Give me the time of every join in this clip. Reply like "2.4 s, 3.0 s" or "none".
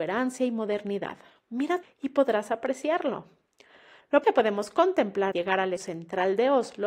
1.8 s, 4.2 s, 5.3 s, 5.8 s